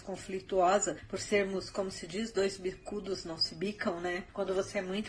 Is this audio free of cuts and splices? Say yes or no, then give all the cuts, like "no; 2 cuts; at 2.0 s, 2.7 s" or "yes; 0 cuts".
yes; 0 cuts